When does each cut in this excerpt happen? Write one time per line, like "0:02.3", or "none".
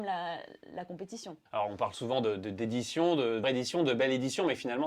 0:01.5
0:03.4